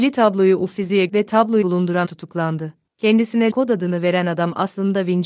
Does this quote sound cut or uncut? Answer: cut